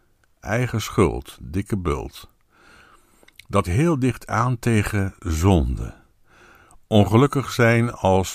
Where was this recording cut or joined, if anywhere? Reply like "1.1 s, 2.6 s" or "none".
3.6 s